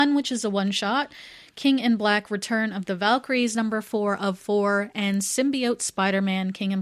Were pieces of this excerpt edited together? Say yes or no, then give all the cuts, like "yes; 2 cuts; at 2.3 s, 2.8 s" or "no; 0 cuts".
no; 0 cuts